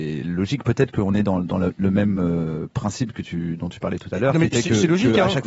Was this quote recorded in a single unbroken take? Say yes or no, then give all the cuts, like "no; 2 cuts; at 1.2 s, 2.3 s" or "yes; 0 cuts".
yes; 0 cuts